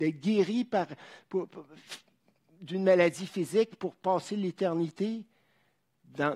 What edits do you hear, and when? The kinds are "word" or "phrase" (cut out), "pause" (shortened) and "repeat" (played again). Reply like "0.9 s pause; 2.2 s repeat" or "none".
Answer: none